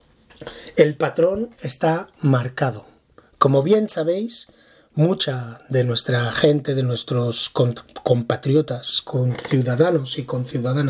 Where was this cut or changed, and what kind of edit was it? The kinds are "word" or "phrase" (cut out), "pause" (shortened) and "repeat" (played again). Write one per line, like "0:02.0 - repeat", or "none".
none